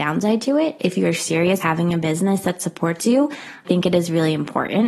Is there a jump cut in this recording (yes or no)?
yes